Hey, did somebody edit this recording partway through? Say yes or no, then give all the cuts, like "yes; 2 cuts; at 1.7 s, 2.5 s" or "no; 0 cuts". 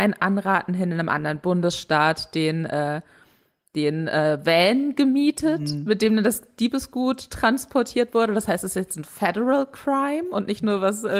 no; 0 cuts